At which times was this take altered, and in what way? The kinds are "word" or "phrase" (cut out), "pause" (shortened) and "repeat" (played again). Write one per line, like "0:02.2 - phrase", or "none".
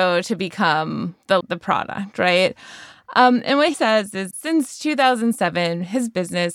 0:01.4 - word
0:03.7 - word
0:04.3 - word